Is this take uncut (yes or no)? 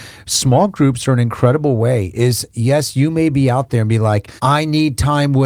no